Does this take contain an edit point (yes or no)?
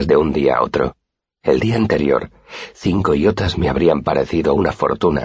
no